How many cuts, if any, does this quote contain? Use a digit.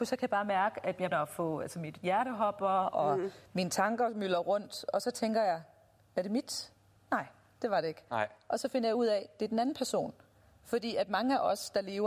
1